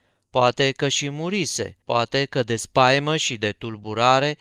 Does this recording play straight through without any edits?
no; 1 cut; at 1.8 s

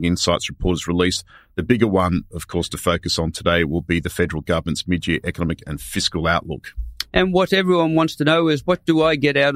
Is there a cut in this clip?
no; 0 cuts

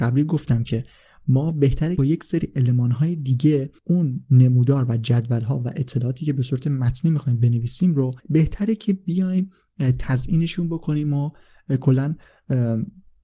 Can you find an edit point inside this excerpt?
yes; 3 cuts; at 2.0 s, 3.8 s, 8.2 s

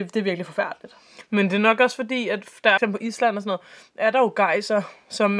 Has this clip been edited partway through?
yes; 1 cut; at 2.8 s

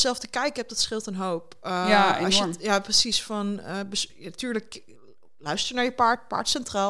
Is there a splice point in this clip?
no; 0 cuts

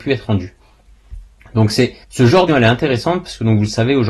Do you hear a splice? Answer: yes; 2 cuts; at 2.0 s, 2.5 s

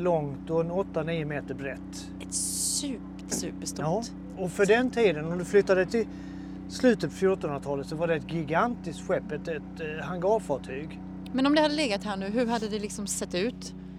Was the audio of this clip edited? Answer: yes; 3 cuts; at 3.3 s, 4.4 s, 5.9 s

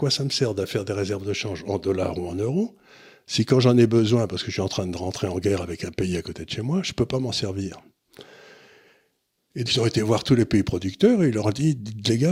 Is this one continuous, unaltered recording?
no; 1 cut; at 9.7 s

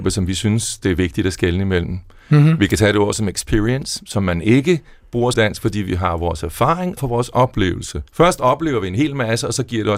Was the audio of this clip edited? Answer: yes; 3 cuts; at 5.3 s, 7.0 s, 8.1 s

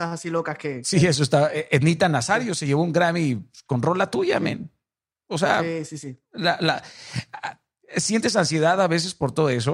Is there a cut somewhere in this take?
no; 0 cuts

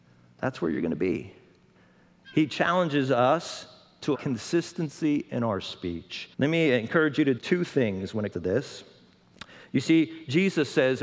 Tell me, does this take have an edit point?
yes; 4 cuts; at 4.1 s, 6.3 s, 7.4 s, 8.3 s

